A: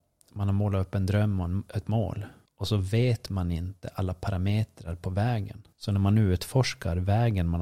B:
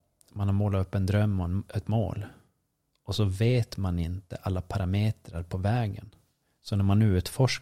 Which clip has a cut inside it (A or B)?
A